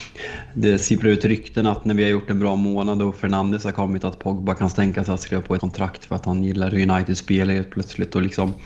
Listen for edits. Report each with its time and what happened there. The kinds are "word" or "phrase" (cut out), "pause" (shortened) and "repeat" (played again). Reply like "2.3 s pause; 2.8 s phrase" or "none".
5.6 s word